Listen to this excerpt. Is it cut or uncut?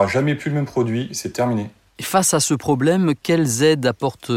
uncut